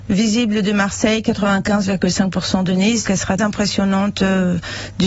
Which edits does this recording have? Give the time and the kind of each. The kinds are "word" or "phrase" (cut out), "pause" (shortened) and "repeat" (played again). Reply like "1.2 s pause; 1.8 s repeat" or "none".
3.1 s word; 3.4 s word